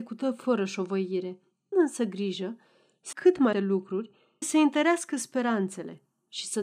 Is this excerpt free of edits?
no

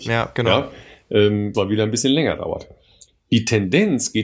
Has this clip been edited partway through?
yes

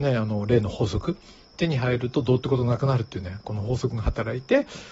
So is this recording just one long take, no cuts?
yes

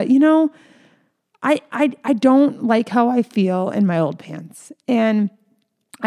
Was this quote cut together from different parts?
no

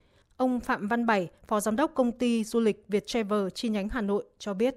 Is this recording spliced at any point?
no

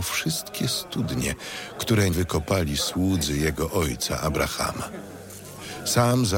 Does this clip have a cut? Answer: yes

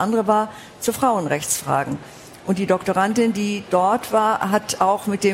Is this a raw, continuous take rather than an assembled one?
yes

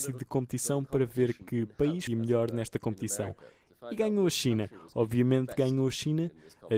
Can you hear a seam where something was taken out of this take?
yes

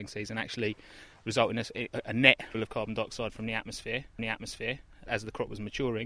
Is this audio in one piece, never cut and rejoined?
no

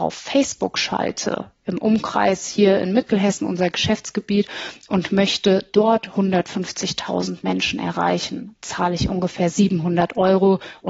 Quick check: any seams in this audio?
no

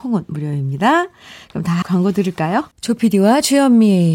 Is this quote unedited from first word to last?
no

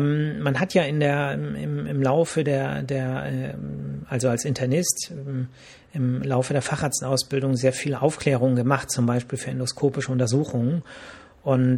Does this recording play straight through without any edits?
yes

